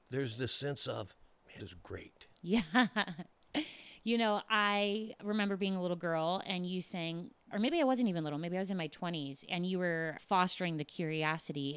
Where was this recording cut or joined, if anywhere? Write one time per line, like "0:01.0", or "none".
0:01.6
0:07.5
0:10.2